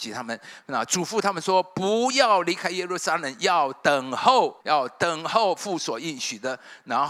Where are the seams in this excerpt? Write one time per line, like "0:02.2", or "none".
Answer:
0:04.6